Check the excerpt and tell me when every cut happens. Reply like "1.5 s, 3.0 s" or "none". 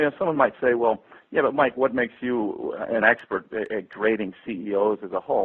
none